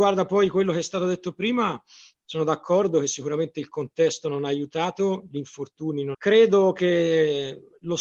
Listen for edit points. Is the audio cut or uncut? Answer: cut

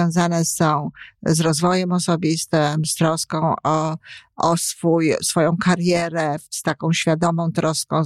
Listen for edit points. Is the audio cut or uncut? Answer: uncut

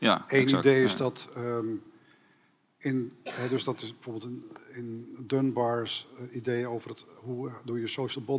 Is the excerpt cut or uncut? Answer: uncut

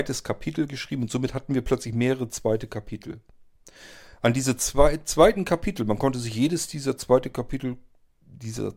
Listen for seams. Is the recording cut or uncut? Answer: uncut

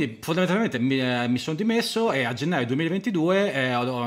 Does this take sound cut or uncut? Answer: uncut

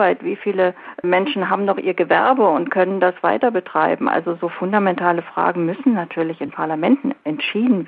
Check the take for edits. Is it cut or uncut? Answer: uncut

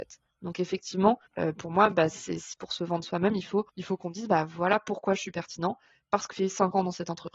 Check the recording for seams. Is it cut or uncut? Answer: cut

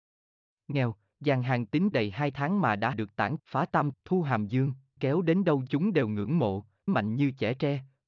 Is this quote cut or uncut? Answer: cut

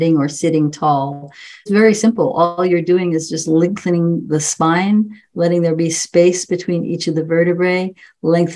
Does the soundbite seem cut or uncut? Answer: uncut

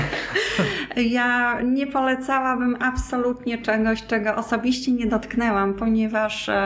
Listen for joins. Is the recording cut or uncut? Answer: uncut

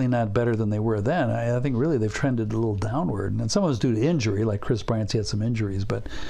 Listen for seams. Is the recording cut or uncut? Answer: uncut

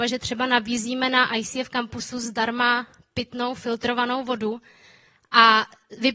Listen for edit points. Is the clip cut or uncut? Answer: uncut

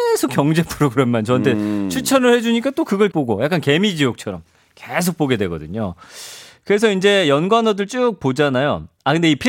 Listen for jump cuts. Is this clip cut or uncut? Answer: cut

